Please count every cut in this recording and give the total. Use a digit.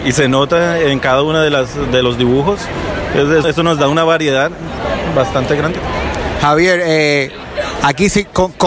2